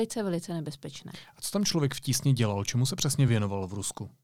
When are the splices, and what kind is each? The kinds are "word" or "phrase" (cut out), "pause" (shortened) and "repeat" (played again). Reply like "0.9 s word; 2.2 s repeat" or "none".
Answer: none